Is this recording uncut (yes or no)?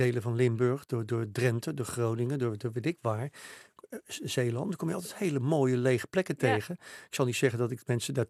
yes